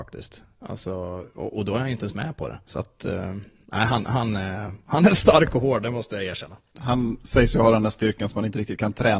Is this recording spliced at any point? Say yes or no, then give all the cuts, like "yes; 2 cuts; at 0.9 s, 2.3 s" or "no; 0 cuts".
no; 0 cuts